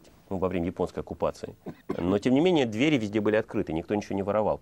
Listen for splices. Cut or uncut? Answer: cut